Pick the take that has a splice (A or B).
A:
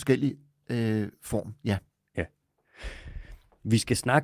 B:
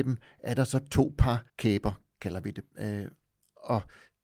B